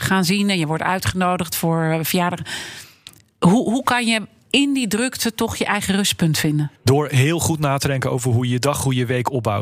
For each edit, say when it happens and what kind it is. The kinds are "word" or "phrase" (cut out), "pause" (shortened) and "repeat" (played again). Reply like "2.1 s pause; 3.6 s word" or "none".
6.8 s pause